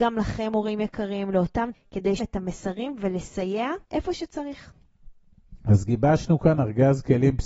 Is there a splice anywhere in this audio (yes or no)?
yes